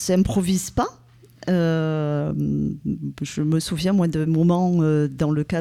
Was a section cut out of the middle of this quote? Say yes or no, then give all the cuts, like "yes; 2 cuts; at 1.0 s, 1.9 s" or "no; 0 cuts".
yes; 1 cut; at 4.3 s